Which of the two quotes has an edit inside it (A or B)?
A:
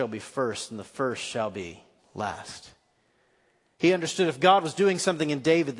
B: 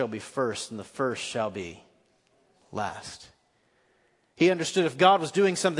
A